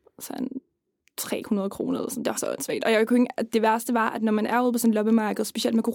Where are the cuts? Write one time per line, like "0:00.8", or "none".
0:02.3